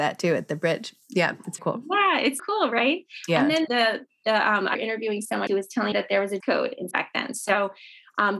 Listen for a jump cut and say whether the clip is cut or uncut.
cut